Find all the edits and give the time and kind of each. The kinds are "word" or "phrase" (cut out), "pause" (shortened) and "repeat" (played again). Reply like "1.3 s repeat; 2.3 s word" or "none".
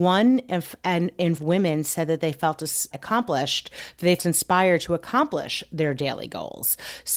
1.4 s word; 2.9 s word; 4.2 s word